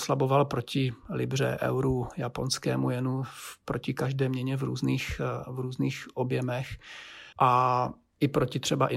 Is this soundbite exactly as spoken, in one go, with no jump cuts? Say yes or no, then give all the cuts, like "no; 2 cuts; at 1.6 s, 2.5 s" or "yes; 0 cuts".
no; 1 cut; at 7.3 s